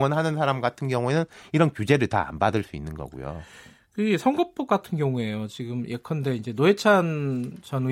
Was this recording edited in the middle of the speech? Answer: no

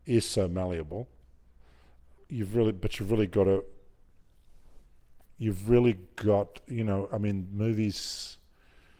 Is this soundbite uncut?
yes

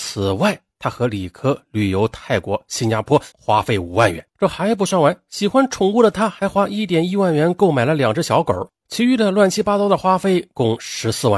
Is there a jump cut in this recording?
yes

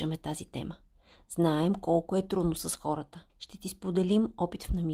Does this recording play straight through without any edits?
no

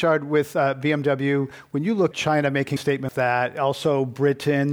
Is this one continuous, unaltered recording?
no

